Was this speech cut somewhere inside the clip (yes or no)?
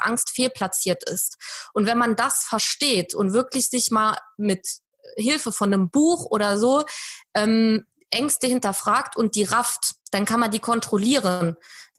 yes